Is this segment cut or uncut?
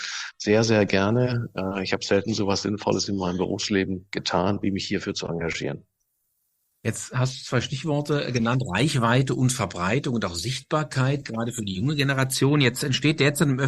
uncut